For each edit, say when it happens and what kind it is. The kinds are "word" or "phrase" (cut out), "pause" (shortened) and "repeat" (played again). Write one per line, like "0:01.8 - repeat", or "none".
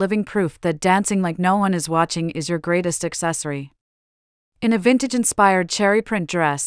none